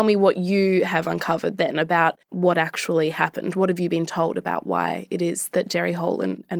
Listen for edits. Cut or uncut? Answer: cut